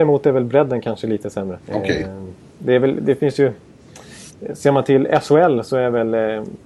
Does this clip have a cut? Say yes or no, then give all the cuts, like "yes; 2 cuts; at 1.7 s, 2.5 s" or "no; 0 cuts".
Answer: yes; 1 cut; at 1.6 s